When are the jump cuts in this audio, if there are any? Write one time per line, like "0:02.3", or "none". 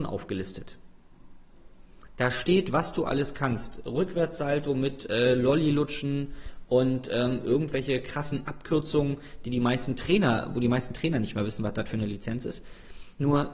none

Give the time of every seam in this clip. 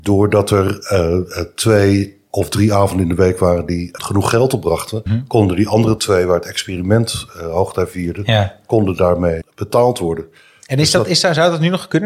0:04.0
0:05.1
0:09.4

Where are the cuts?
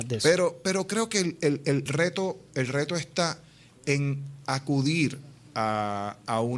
0:01.9

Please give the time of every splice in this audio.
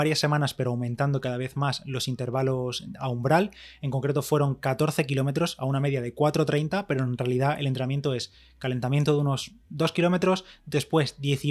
none

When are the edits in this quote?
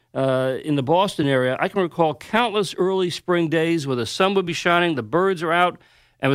none

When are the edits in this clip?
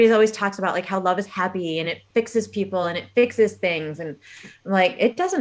none

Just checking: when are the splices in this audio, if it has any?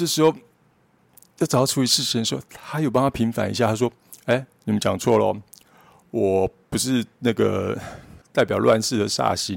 0:08.2

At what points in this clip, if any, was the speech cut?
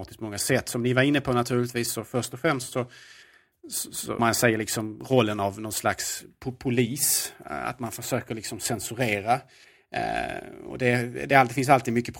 0:04.2

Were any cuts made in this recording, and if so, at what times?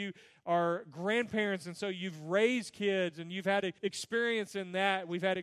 0:03.8

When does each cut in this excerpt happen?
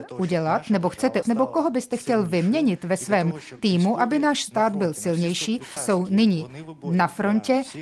0:01.2
0:05.8

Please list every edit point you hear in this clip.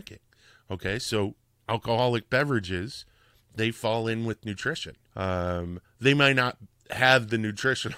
0:05.1

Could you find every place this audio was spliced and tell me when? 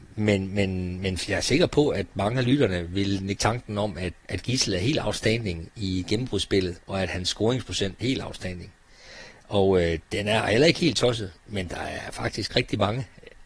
0:03.4
0:04.2
0:06.8
0:08.0
0:11.4

